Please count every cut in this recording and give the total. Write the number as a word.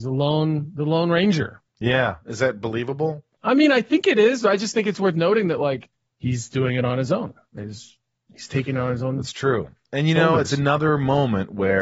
zero